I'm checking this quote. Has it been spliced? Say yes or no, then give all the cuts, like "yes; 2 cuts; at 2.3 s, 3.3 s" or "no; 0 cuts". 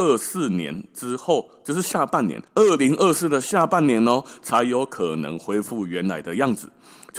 yes; 1 cut; at 2.5 s